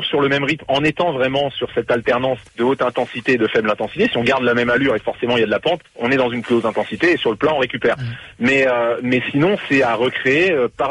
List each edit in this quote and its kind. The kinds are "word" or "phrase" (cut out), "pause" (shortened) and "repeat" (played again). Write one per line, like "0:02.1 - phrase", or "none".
0:02.5 - pause
0:05.9 - pause